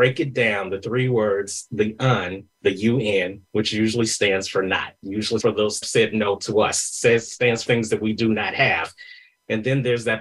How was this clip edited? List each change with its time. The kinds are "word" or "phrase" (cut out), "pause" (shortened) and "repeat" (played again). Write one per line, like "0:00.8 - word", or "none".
0:05.4 - phrase
0:05.8 - phrase
0:07.7 - word